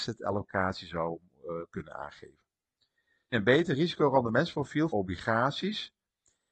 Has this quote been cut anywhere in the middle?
yes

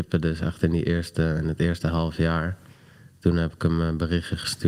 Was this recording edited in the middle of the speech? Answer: no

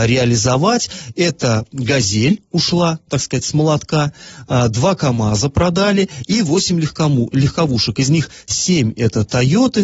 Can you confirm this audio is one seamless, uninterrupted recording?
yes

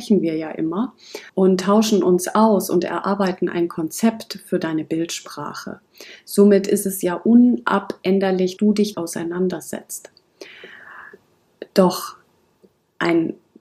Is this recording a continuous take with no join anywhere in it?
no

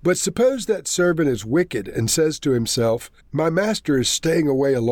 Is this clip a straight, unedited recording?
no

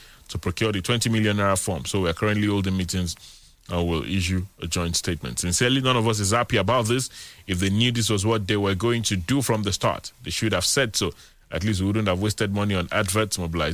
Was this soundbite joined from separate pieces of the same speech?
no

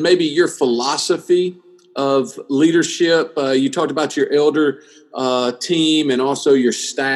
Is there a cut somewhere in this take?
no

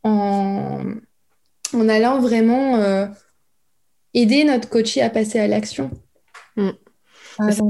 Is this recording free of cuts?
yes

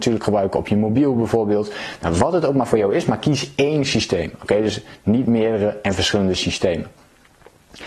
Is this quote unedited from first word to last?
yes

